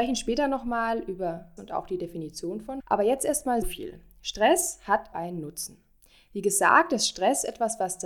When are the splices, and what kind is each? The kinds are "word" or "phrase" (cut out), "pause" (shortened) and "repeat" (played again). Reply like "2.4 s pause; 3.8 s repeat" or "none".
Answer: 1.6 s word; 2.8 s word; 3.6 s word; 5.1 s word